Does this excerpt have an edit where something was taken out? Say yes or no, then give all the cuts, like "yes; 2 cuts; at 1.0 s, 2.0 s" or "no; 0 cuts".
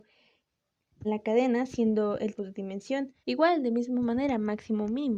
yes; 3 cuts; at 1.0 s, 2.4 s, 3.2 s